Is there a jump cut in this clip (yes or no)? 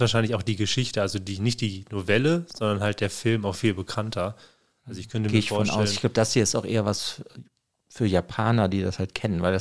no